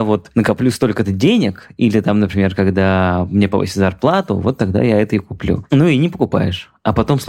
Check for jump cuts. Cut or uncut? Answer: uncut